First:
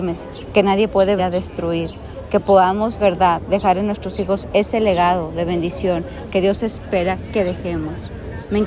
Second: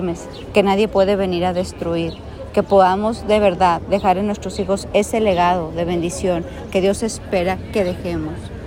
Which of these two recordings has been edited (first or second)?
first